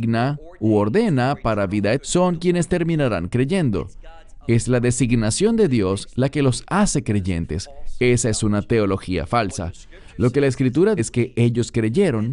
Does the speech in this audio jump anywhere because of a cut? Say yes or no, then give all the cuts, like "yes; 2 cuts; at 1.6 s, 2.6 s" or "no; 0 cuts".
yes; 2 cuts; at 2.0 s, 11.0 s